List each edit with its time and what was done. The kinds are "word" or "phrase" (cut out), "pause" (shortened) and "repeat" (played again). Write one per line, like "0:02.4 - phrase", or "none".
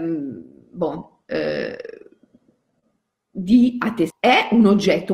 0:04.1 - word